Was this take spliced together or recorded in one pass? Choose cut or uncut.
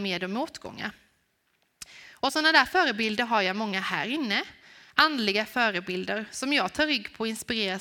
uncut